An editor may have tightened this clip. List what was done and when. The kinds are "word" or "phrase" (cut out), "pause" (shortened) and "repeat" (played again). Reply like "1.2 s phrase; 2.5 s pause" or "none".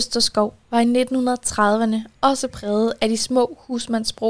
none